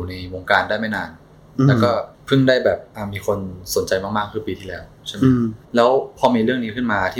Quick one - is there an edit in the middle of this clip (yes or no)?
yes